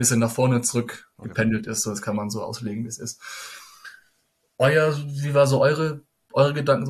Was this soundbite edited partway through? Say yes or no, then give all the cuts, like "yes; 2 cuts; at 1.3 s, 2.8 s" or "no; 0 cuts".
no; 0 cuts